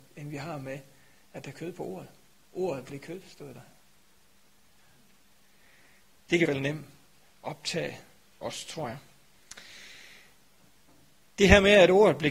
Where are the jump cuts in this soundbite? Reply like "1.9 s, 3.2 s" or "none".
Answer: 1.5 s, 6.4 s